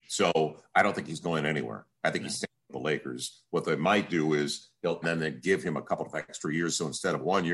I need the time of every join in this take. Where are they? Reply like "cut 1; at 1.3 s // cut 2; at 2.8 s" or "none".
cut 1; at 5.0 s